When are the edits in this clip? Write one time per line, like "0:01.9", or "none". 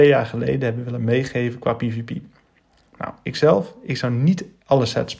none